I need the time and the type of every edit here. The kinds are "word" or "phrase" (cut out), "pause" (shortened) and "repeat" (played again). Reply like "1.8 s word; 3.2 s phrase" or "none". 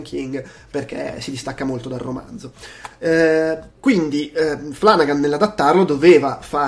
3.7 s pause

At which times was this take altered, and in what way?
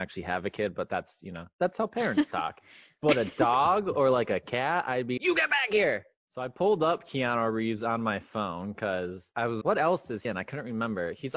5.2 s word; 9.6 s word; 10.2 s word

